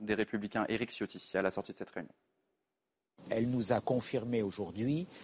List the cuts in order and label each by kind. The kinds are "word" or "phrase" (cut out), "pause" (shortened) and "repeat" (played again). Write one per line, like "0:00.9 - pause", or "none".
none